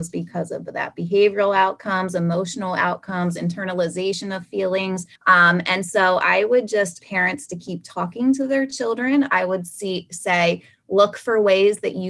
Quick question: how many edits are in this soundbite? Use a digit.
2